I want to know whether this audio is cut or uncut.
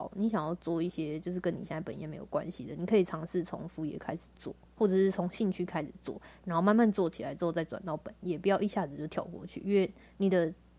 cut